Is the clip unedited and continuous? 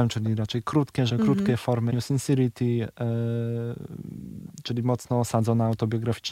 no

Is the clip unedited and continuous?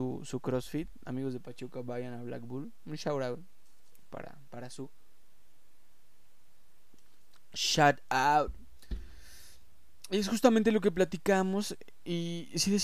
yes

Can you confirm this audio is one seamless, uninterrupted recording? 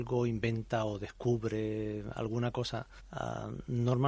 no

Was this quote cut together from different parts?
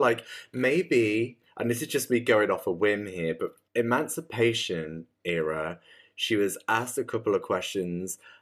no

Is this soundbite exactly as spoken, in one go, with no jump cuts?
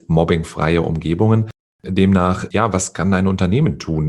yes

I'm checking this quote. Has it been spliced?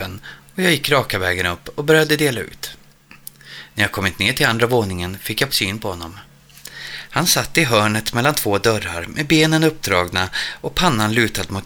yes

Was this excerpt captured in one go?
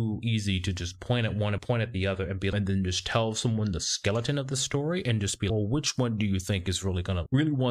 yes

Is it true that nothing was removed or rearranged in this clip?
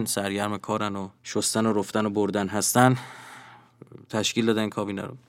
no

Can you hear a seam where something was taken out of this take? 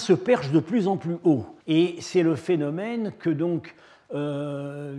yes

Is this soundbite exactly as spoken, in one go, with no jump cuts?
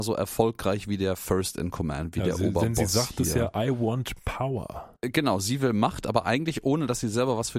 no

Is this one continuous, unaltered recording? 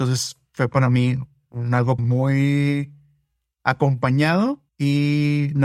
no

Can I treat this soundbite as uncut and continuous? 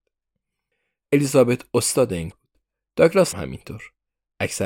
no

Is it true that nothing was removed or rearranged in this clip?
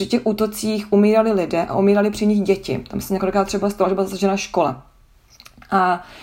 yes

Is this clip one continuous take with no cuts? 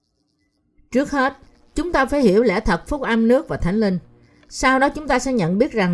yes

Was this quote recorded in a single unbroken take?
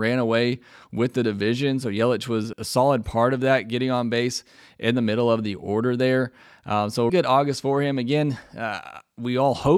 no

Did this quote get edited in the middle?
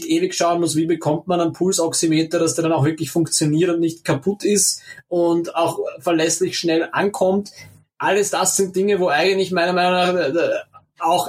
no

